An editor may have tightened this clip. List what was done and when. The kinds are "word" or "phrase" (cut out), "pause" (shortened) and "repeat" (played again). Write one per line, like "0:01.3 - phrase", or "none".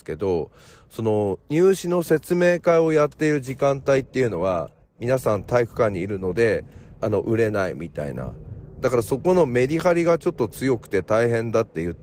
0:07.0 - phrase